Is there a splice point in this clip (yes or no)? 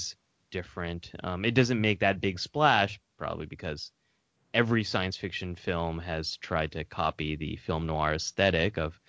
no